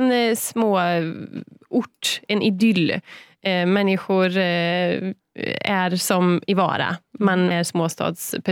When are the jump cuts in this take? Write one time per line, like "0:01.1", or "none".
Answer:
0:07.5